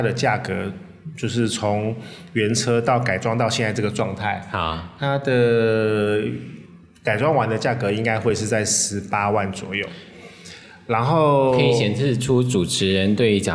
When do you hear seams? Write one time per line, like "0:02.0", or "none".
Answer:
none